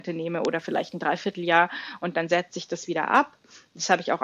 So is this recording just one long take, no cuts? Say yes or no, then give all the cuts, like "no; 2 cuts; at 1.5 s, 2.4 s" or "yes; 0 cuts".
yes; 0 cuts